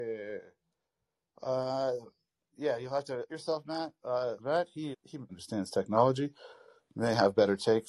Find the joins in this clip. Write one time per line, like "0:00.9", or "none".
0:03.3
0:04.4
0:04.9
0:05.3